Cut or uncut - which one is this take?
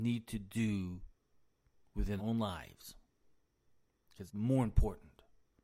cut